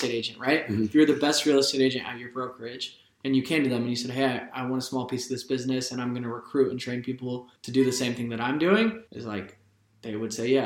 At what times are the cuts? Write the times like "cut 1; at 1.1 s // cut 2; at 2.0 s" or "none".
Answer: cut 1; at 7.6 s // cut 2; at 9.1 s